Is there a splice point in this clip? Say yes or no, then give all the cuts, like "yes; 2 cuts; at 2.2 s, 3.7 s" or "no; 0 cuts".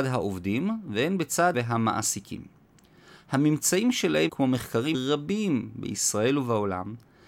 yes; 3 cuts; at 1.5 s, 4.3 s, 4.9 s